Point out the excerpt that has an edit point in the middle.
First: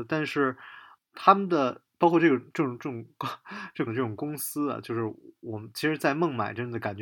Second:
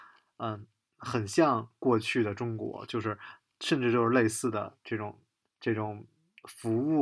first; 2 cuts; at 1.0 s, 3.9 s

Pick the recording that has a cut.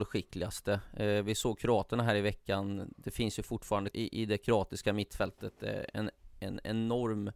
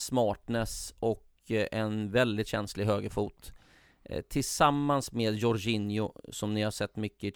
first; 1 cut; at 3.9 s

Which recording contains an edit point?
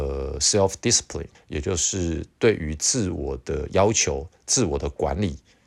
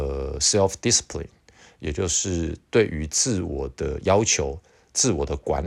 first; 2 cuts; at 1.3 s, 4.4 s

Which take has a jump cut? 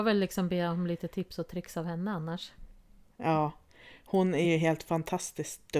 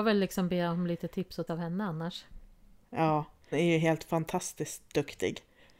second; 2 cuts; at 1.5 s, 3.5 s

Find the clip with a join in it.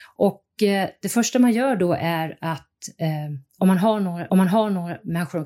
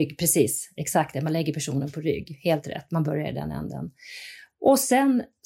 first; 1 cut; at 4.3 s

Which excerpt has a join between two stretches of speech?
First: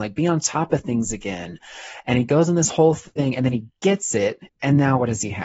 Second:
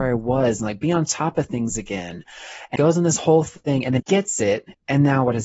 second; 2 cuts; at 2.8 s, 4.0 s

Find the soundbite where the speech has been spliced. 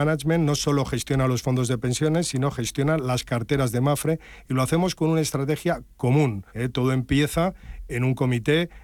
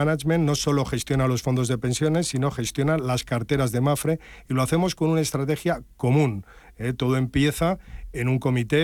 first; 1 cut; at 6.5 s

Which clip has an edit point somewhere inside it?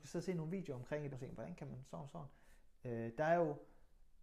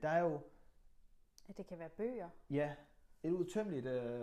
first; 1 cut; at 1.1 s

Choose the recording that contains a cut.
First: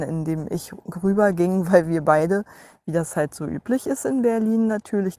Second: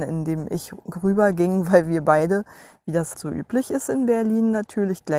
second; 1 cut; at 3.1 s

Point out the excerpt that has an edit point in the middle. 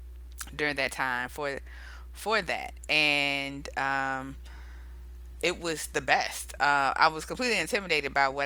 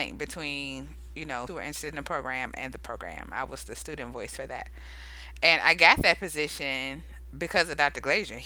second; 1 cut; at 1.5 s

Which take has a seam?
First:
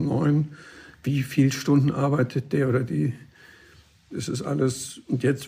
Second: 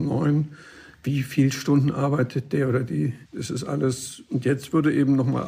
second; 1 cut; at 3.3 s

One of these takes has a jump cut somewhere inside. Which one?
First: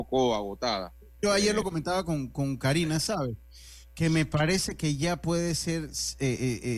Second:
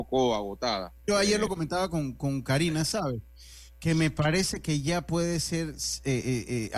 second; 1 cut; at 1.0 s

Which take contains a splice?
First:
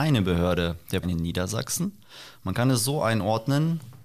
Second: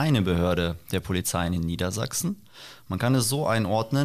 first; 1 cut; at 1.0 s

